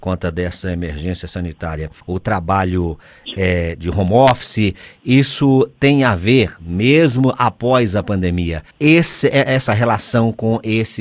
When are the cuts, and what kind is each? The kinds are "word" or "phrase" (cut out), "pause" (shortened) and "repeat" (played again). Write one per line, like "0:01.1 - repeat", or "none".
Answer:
0:02.0 - pause
0:08.7 - pause